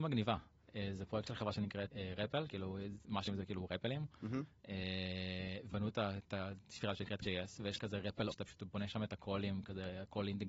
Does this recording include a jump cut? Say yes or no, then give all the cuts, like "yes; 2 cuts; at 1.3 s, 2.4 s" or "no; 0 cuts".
yes; 7 cuts; at 1.9 s, 2.5 s, 3.3 s, 5.7 s, 7.2 s, 7.8 s, 8.3 s